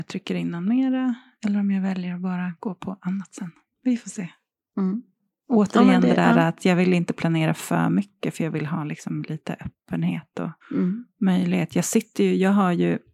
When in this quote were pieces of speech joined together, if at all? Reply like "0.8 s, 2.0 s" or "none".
10.6 s